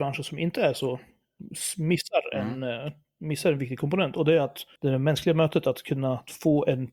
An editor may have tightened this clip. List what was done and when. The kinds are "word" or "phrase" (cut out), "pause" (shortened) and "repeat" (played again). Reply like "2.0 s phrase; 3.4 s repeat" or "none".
4.8 s pause